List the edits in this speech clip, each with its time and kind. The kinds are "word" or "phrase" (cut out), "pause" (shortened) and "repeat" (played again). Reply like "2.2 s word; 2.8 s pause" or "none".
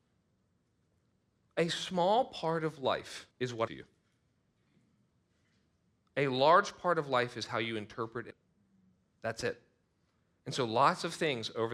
3.3 s pause; 3.7 s word; 8.3 s word; 9.8 s pause